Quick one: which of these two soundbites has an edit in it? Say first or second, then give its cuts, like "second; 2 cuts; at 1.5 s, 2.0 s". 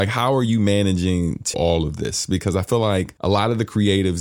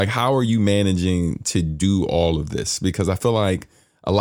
first; 2 cuts; at 1.5 s, 3.2 s